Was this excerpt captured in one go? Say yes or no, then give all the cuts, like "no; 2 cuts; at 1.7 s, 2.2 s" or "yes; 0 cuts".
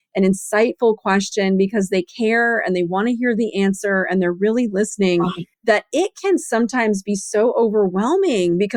no; 1 cut; at 5.5 s